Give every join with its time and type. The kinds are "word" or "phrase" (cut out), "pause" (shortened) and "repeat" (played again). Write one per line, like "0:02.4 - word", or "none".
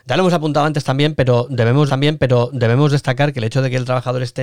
0:01.9 - repeat